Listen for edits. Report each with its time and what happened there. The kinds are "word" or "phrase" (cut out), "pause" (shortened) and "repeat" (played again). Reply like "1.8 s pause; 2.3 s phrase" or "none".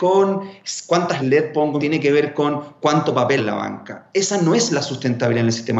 1.2 s word; 1.8 s phrase; 3.4 s word